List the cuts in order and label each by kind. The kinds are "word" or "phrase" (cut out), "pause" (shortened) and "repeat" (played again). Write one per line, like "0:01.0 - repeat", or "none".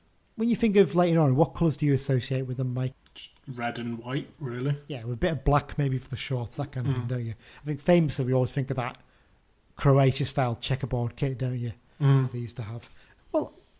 none